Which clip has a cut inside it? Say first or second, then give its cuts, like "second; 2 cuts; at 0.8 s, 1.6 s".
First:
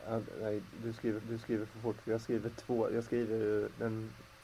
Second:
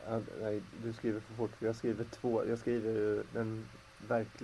first; 1 cut; at 1.2 s